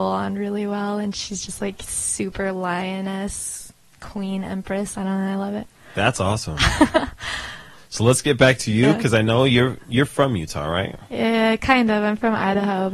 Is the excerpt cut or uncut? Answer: uncut